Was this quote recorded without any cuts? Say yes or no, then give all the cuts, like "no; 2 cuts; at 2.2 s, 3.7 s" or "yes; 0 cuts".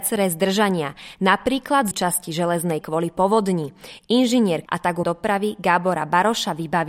no; 4 cuts; at 1.9 s, 2.8 s, 4.7 s, 5.0 s